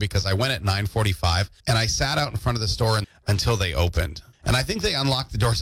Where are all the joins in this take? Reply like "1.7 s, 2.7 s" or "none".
1.6 s, 3.0 s, 4.3 s